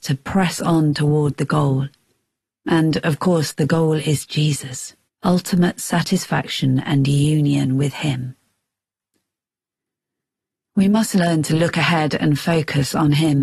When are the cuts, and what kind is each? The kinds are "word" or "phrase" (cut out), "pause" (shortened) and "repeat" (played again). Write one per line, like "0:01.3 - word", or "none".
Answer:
0:05.1 - pause